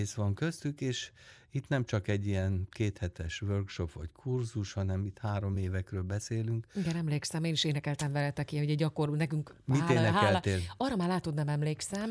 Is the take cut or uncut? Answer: uncut